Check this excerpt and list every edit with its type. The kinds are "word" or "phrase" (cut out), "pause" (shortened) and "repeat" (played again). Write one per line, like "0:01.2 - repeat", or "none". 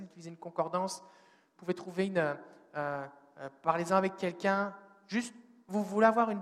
none